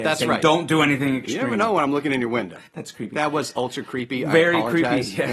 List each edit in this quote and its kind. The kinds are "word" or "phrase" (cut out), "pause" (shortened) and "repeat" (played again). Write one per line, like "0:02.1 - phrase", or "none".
0:02.7 - pause